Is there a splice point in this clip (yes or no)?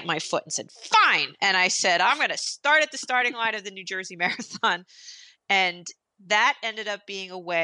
no